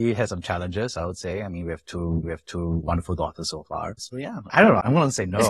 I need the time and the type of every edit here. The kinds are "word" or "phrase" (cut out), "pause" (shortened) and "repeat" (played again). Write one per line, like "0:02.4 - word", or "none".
0:02.2 - repeat